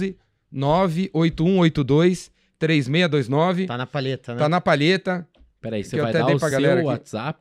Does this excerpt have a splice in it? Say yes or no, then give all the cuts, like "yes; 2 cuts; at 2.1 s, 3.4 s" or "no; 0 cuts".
no; 0 cuts